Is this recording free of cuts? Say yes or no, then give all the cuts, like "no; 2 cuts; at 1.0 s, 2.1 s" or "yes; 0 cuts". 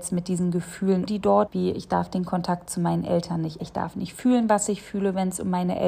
no; 3 cuts; at 1.1 s, 1.5 s, 3.6 s